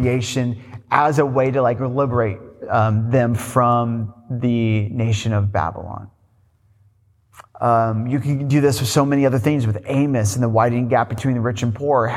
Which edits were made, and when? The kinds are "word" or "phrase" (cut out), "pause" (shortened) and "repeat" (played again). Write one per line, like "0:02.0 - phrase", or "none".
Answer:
0:07.5 - pause